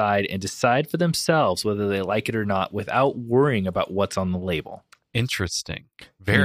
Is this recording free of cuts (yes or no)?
yes